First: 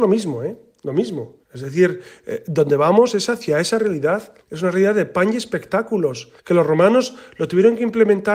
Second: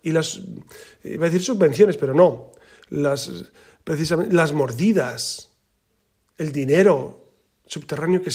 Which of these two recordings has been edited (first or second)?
first